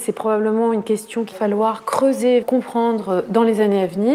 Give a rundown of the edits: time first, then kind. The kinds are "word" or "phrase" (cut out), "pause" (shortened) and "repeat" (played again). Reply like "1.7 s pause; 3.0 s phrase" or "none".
1.3 s word; 2.4 s word